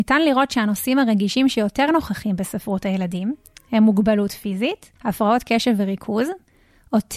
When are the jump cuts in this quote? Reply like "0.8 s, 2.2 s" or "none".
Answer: 5.0 s